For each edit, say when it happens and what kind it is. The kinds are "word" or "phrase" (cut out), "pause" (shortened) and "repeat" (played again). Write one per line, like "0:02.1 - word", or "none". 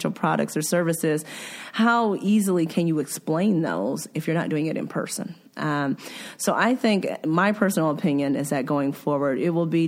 0:05.5 - pause